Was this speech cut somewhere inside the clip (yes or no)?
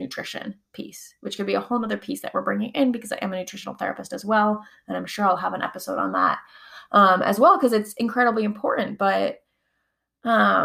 no